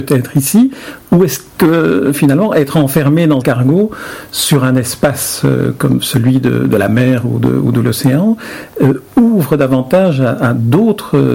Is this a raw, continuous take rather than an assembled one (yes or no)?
no